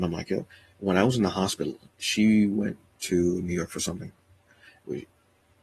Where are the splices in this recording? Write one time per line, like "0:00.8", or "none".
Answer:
none